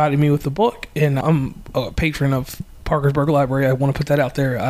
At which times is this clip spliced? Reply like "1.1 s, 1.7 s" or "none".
1.2 s